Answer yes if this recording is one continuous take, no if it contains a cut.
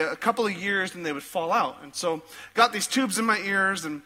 yes